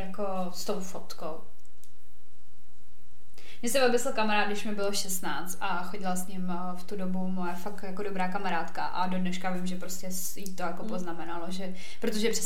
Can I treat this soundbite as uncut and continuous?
yes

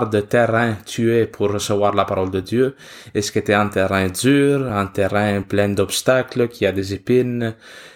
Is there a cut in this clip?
no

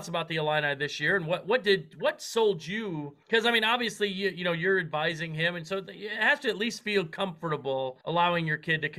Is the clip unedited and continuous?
no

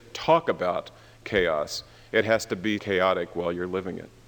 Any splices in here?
yes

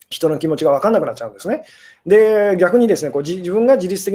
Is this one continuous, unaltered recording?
yes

